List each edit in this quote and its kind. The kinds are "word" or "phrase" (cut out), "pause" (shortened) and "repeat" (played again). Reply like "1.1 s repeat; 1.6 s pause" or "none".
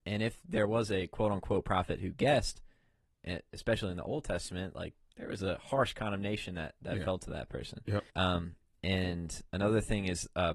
8.1 s pause